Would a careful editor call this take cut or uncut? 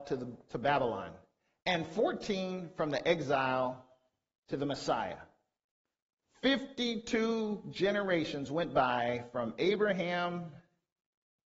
uncut